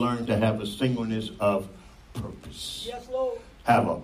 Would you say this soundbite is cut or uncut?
uncut